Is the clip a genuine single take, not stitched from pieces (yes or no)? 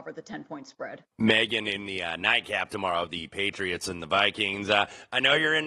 no